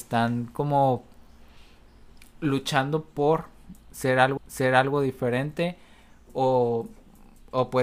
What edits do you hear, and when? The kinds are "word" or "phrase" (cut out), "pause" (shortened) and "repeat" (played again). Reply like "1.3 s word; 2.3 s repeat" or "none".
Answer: 4.4 s repeat